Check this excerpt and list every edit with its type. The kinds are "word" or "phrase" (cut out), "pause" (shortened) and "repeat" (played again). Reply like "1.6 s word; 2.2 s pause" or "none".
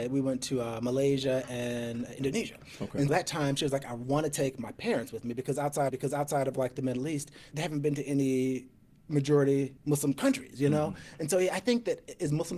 3.1 s word; 5.9 s repeat; 7.5 s word; 9.8 s pause